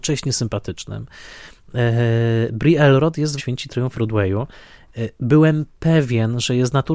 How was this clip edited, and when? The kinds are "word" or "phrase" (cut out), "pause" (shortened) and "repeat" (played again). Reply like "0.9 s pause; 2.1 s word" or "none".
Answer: 3.4 s phrase; 3.9 s word

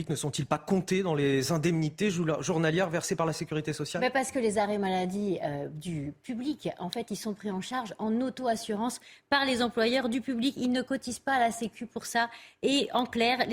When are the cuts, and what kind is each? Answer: none

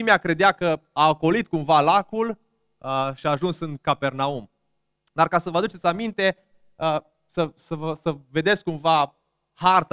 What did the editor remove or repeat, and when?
none

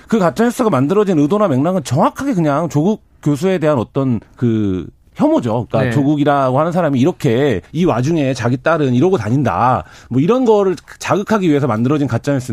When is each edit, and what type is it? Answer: 4.2 s pause; 7.7 s pause

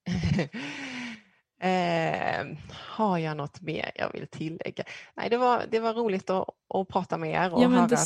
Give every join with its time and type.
none

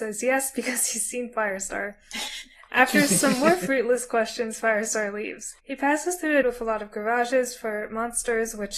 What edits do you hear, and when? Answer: 5.6 s pause; 6.4 s word

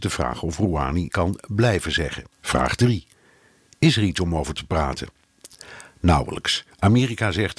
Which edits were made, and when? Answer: 1.1 s word; 2.3 s pause

